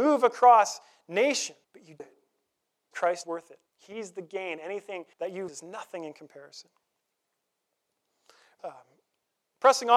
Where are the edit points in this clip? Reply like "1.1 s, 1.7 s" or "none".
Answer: 1.6 s, 2.0 s, 2.9 s, 3.2 s, 3.7 s, 5.1 s, 5.5 s, 8.6 s